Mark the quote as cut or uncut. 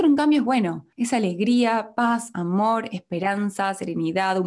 uncut